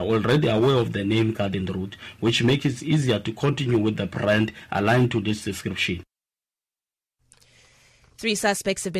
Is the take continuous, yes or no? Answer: yes